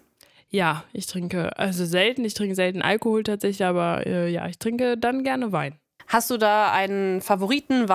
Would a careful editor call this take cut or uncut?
uncut